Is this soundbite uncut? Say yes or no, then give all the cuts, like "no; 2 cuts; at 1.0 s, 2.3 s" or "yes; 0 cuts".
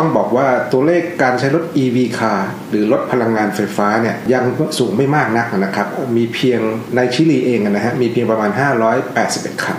yes; 0 cuts